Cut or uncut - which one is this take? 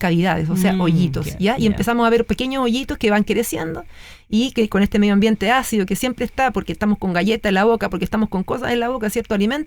uncut